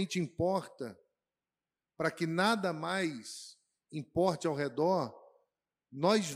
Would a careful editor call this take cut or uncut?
uncut